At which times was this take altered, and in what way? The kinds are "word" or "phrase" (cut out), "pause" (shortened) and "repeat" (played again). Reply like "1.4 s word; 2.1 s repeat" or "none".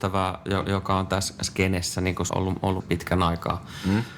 2.3 s word; 2.8 s word